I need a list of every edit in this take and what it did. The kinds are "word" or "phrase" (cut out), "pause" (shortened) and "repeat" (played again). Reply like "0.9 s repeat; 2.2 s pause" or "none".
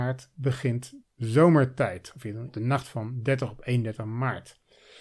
1.0 s word; 2.5 s word